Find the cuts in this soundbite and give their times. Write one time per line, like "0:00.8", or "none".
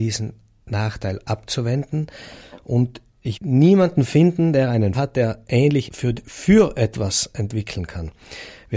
0:03.3
0:04.9
0:05.9